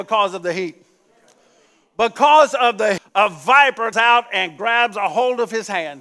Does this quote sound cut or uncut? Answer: cut